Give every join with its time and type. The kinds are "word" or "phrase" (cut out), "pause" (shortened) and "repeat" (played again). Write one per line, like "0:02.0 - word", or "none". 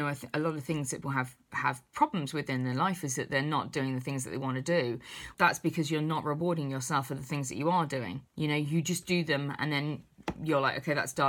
0:01.0 - word
0:05.3 - word
0:08.3 - pause